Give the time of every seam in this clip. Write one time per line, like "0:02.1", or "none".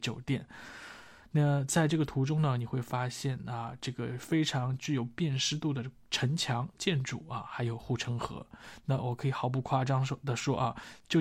none

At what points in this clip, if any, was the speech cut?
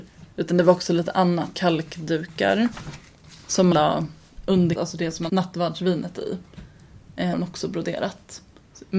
0:01.5
0:03.7
0:04.8
0:05.3
0:07.3

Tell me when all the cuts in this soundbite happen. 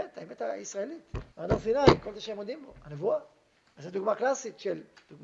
0:01.3
0:03.6

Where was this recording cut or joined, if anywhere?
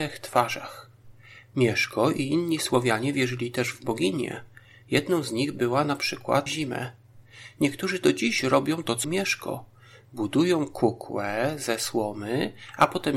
0:06.5
0:09.0

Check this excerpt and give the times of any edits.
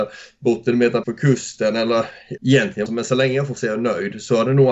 0:01.0
0:02.4
0:02.9
0:03.6

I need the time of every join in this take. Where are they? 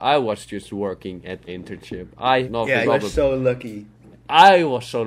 0:01.5
0:02.4
0:02.8

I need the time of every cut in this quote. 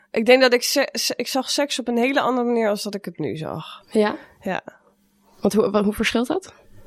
none

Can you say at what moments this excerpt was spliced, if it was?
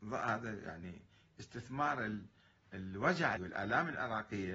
0:03.4

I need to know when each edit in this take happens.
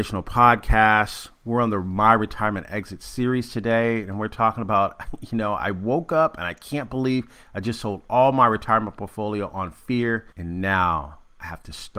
0:10.3

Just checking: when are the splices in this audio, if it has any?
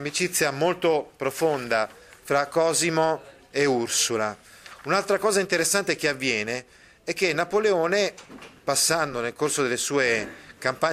none

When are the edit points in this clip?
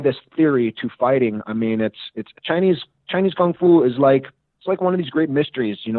none

